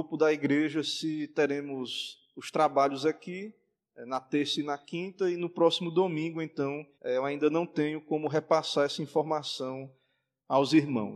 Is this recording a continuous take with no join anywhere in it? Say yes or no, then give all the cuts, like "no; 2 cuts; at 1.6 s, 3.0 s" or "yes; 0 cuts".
no; 1 cut; at 6.9 s